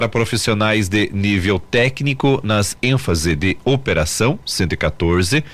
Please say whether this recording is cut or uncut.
uncut